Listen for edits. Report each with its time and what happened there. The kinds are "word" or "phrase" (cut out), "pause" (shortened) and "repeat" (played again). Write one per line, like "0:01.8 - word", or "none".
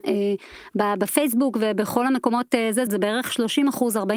0:02.9 - phrase